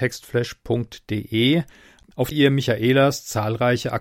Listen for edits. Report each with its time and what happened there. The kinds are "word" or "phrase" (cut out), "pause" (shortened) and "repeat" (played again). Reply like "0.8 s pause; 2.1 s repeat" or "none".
2.3 s word